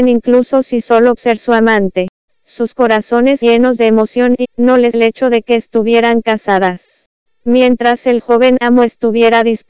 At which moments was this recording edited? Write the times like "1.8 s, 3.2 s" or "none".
1.2 s, 3.4 s, 4.4 s, 4.9 s